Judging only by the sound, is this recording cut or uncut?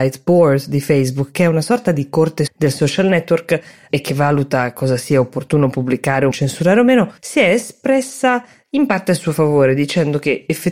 cut